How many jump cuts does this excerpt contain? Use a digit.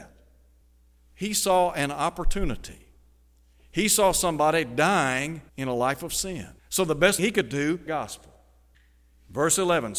4